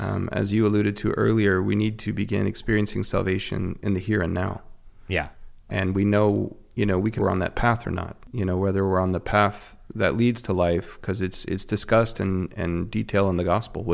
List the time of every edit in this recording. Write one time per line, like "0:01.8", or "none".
0:05.7
0:07.2